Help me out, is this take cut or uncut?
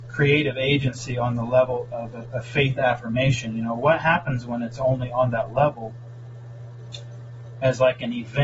uncut